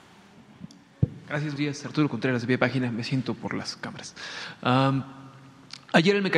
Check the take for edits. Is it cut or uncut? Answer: cut